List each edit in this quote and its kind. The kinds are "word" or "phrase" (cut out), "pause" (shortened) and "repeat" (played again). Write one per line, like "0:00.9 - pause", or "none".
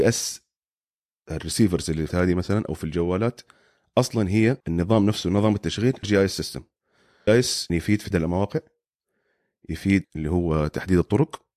0:02.1 - word
0:04.6 - pause
0:06.0 - word
0:07.3 - word
0:07.7 - word
0:08.1 - word
0:10.0 - phrase

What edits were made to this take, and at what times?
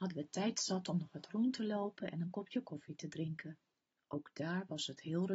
none

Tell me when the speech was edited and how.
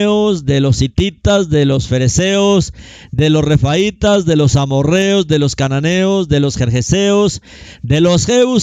none

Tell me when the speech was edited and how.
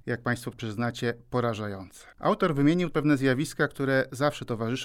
0:02.1 - pause
0:02.9 - word

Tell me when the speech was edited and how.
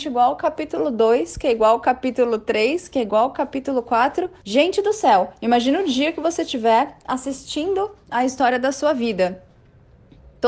0:04.4 - pause

